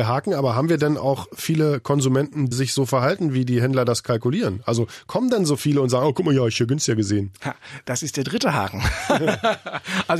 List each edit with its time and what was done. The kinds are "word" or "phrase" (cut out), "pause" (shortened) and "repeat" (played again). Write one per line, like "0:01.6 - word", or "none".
0:02.5 - word

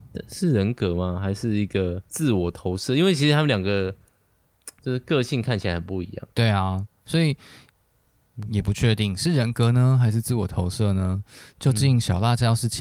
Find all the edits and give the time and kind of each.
0:02.1 - pause
0:04.8 - pause
0:06.3 - pause

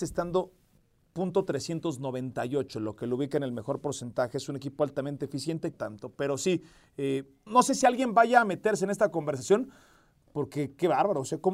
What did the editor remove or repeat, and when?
0:05.7 - phrase
0:07.5 - word

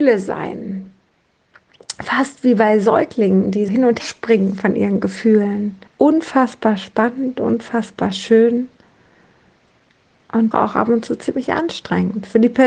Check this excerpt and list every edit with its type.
0:03.7 - word
0:04.0 - word
0:05.9 - pause
0:10.5 - word

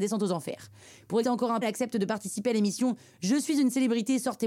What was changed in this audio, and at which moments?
0:01.2 - word
0:01.6 - word

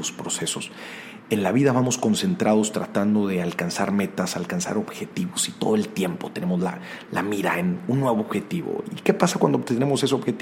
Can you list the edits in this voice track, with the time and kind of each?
none

